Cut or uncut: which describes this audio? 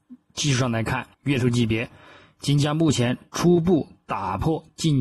cut